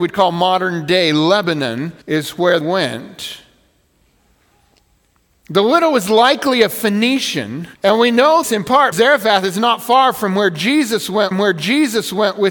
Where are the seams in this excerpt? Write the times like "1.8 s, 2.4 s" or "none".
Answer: 2.0 s, 2.6 s, 7.7 s, 8.4 s, 8.9 s, 11.3 s